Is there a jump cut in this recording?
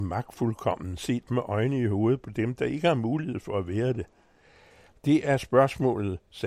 no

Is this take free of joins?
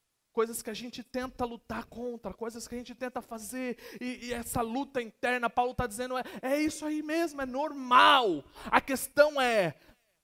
yes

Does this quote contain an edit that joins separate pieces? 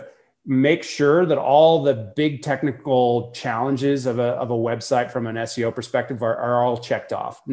no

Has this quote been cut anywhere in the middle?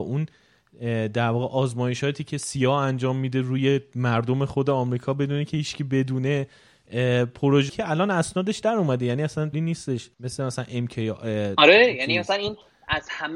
yes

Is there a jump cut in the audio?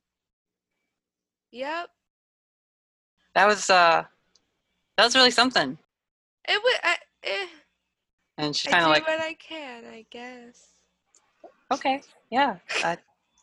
yes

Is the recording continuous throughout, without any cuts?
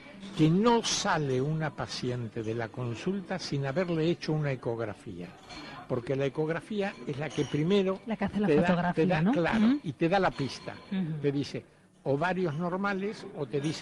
yes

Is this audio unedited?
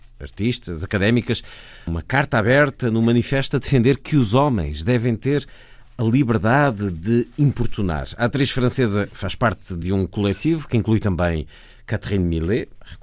yes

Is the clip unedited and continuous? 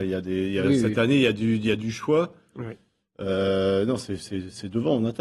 yes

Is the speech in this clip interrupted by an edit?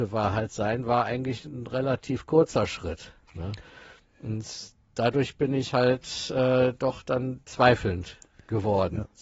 no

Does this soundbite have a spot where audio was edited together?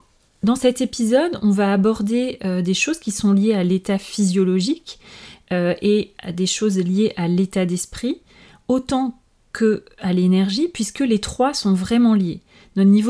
no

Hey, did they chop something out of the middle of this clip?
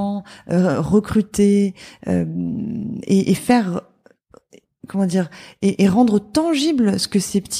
no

